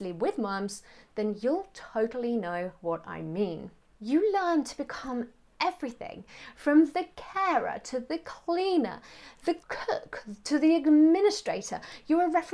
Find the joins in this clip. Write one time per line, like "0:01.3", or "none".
none

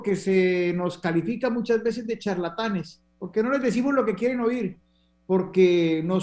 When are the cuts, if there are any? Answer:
none

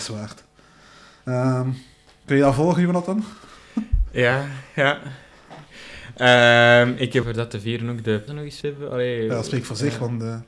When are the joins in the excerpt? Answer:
0:07.2
0:08.3
0:08.6

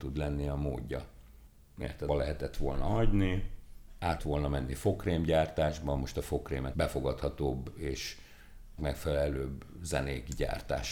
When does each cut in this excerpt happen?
0:02.1
0:04.2
0:06.7
0:08.8

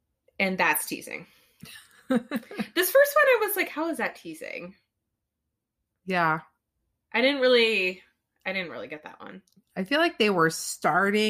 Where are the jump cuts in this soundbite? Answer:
none

